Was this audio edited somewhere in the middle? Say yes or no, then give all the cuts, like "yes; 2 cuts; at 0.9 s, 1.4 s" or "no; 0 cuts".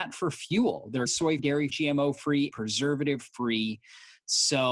yes; 4 cuts; at 1.1 s, 1.4 s, 1.7 s, 2.5 s